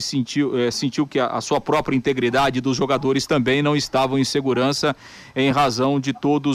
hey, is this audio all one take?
yes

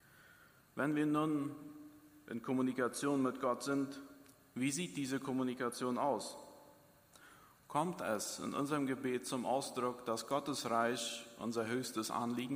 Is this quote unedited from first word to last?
yes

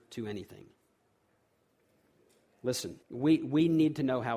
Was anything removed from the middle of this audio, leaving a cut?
yes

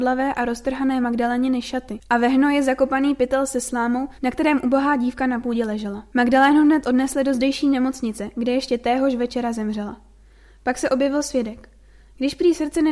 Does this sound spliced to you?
yes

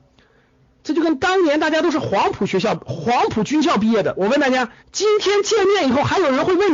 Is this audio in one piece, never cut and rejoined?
no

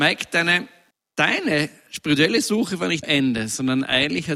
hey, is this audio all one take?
no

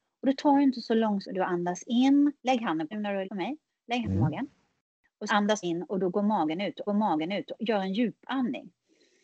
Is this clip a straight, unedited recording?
no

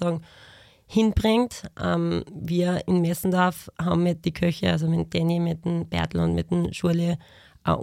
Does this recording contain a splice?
no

